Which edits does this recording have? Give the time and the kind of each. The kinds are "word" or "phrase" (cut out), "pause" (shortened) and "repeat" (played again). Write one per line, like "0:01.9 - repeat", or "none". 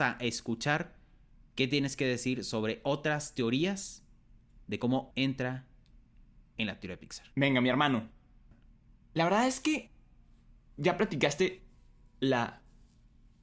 0:05.1 - word
0:07.3 - pause